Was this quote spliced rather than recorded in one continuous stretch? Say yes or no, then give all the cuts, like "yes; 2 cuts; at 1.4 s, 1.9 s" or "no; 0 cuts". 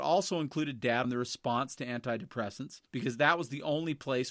yes; 2 cuts; at 1.0 s, 2.9 s